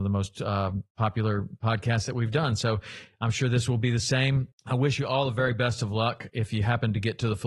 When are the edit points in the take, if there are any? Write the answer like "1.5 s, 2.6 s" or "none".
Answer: 4.5 s